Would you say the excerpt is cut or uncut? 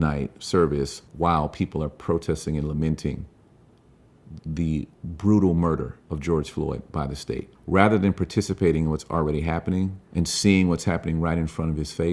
cut